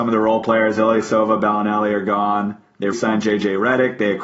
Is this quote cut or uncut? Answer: cut